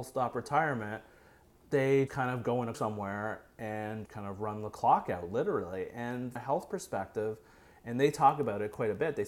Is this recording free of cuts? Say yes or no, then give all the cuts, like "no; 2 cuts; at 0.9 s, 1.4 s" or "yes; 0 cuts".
no; 4 cuts; at 2.1 s, 2.7 s, 4.1 s, 6.4 s